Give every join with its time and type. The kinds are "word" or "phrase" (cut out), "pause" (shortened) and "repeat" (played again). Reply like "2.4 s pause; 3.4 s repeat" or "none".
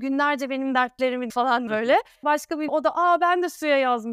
1.3 s word; 1.7 s word; 2.2 s word; 2.7 s word